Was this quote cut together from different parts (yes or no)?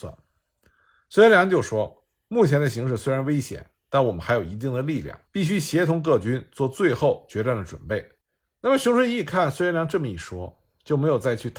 yes